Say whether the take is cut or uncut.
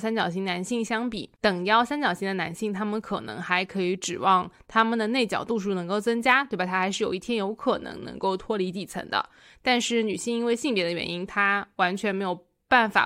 uncut